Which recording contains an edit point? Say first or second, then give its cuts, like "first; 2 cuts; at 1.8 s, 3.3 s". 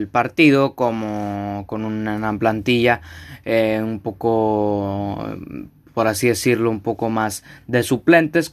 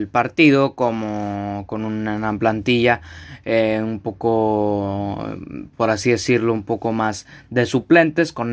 second; 1 cut; at 5.7 s